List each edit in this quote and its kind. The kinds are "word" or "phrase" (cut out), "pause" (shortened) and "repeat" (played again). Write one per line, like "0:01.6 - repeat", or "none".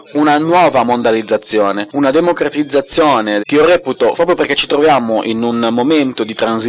0:03.4 - phrase
0:04.2 - word

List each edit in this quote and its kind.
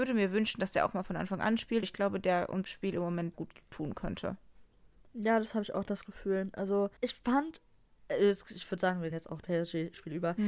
0:01.8 - word
0:02.7 - word
0:03.3 - word
0:07.0 - pause
0:09.1 - word
0:09.4 - word

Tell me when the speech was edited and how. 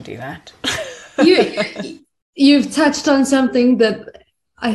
none

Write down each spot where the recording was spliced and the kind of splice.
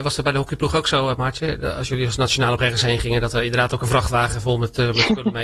0:02.6 - word

